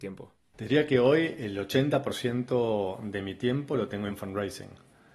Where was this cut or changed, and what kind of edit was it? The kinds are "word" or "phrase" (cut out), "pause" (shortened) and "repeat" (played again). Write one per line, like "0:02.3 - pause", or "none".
0:04.1 - word